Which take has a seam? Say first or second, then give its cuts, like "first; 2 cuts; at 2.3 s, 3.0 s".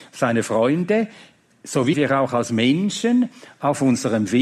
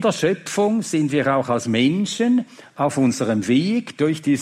first; 1 cut; at 1.9 s